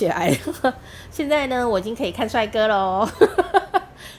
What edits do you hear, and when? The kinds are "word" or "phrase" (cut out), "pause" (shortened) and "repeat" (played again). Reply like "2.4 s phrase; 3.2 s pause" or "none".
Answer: none